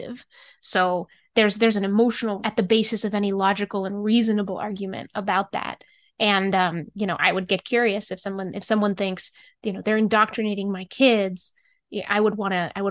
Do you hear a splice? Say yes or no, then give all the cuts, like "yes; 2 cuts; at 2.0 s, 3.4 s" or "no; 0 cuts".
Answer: yes; 1 cut; at 2.4 s